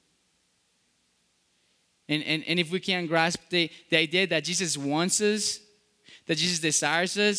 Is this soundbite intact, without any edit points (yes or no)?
yes